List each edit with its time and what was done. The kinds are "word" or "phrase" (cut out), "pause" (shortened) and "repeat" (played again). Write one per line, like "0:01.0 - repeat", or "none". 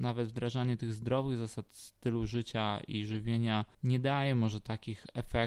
0:03.7 - pause